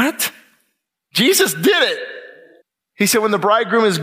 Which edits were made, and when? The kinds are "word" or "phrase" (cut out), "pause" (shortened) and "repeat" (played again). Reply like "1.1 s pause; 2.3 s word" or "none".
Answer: 2.6 s pause